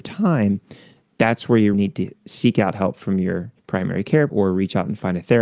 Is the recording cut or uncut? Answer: cut